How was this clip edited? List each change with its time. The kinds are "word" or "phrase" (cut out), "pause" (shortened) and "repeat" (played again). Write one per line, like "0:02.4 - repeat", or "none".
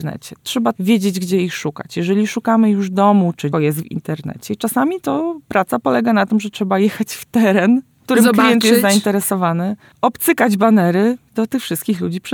0:03.5 - phrase

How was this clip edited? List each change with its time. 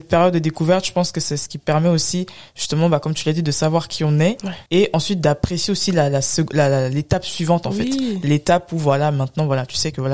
0:04.7 - pause

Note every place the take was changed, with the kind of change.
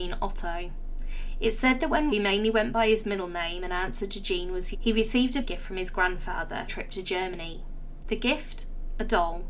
0:02.1 - word
0:04.7 - word
0:05.4 - word
0:06.7 - phrase

